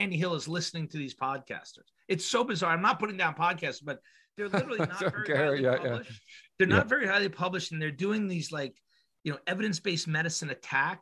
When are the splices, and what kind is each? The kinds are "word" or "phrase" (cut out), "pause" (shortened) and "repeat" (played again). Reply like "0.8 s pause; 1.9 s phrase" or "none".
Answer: none